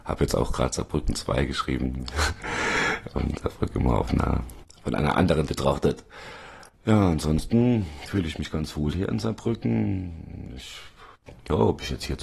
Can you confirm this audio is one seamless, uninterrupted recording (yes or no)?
no